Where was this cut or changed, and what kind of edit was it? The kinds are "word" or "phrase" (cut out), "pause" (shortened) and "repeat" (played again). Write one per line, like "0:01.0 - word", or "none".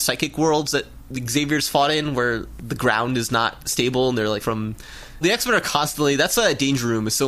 0:02.6 - word
0:04.4 - word
0:05.2 - word